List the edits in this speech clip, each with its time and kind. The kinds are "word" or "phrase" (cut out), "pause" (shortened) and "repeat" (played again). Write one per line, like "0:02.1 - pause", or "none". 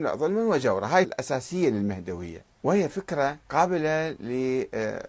0:01.0 - word
0:02.5 - pause
0:03.4 - pause